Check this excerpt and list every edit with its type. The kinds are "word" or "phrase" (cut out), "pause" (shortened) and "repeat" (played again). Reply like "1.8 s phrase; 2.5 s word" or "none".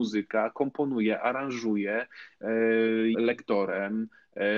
3.1 s word